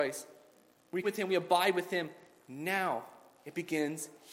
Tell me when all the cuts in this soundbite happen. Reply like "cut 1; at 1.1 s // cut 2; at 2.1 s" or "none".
cut 1; at 1.0 s